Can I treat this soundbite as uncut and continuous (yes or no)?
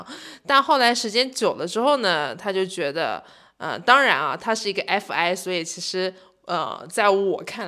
yes